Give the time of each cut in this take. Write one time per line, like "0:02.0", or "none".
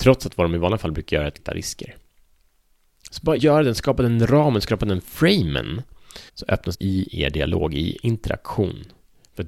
0:01.4
0:03.4
0:06.3
0:06.7
0:08.0